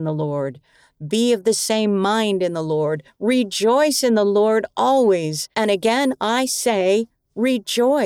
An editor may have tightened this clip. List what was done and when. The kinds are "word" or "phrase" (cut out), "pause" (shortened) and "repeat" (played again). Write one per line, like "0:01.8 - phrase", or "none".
0:05.5 - pause